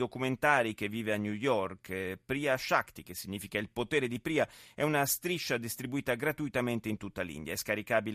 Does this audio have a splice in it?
no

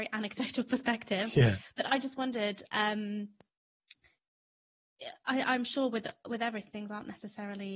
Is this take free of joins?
no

